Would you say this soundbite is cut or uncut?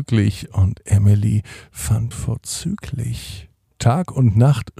cut